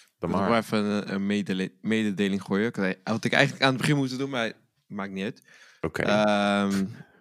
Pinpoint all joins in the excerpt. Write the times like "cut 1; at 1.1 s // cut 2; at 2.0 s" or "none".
none